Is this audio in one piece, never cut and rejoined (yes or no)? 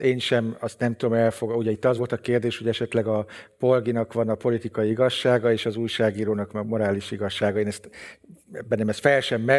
yes